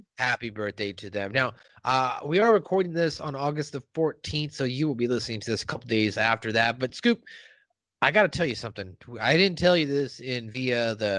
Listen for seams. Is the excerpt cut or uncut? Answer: uncut